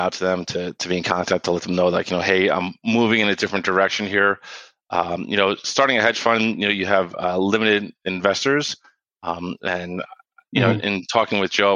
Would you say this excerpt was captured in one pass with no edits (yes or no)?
yes